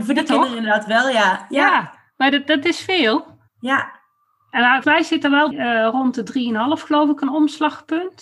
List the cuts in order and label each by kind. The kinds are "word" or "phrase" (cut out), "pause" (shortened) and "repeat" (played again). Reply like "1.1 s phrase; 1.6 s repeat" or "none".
3.5 s pause; 4.8 s word; 5.5 s phrase